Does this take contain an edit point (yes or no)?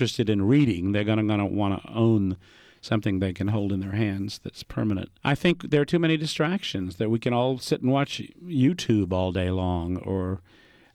yes